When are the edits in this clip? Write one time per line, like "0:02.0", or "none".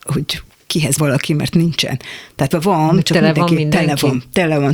0:01.0
0:02.5